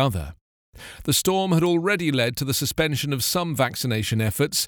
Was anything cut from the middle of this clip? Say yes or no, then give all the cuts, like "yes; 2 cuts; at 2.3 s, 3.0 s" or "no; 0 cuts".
no; 0 cuts